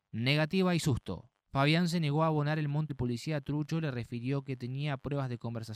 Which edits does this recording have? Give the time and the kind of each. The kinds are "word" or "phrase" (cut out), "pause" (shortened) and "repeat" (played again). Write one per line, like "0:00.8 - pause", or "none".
0:01.4 - pause
0:02.9 - phrase